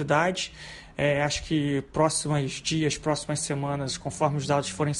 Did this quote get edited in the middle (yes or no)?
no